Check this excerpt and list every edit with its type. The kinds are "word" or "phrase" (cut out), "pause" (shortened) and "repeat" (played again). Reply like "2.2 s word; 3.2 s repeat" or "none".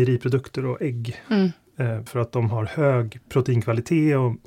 1.3 s phrase; 2.1 s word